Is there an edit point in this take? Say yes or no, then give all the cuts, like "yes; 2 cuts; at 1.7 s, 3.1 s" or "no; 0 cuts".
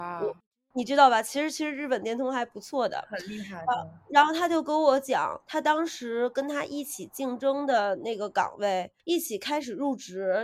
yes; 1 cut; at 5.4 s